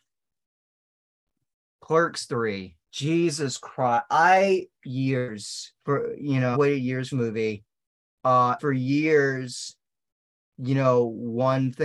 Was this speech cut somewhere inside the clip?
yes; 6 cuts; at 2.8 s, 4.7 s, 5.8 s, 6.5 s, 7.1 s, 8.6 s

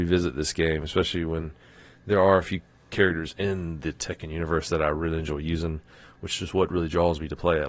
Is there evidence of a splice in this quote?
no; 0 cuts

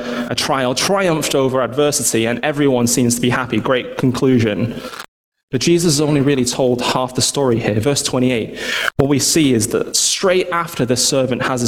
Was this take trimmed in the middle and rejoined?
yes; 1 cut; at 5.2 s

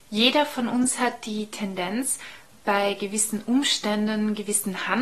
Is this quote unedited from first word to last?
yes; 0 cuts

